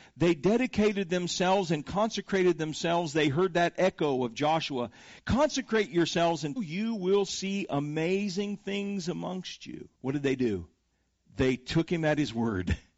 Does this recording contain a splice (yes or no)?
yes